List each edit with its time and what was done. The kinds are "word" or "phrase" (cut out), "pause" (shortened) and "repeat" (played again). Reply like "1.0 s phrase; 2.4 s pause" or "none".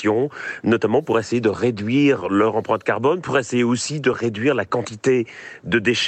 none